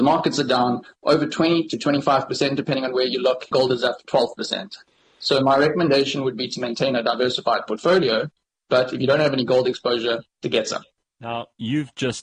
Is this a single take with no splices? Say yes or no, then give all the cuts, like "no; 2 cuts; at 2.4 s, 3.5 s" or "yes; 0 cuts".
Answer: no; 1 cut; at 3.5 s